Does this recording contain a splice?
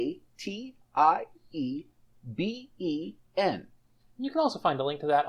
yes; 1 cut; at 3.3 s

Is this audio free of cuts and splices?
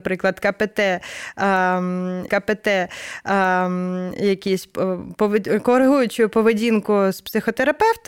no; 1 cut; at 2.3 s

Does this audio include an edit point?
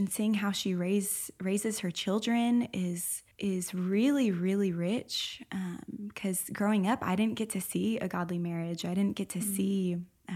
yes; 1 cut; at 3.3 s

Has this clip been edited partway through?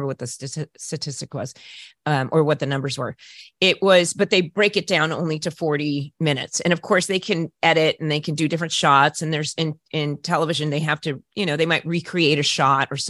no; 0 cuts

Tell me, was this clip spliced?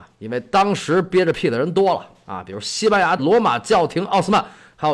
yes; 1 cut; at 3.2 s

